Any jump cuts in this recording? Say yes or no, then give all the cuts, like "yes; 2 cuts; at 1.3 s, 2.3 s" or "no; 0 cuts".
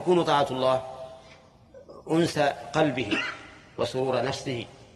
no; 0 cuts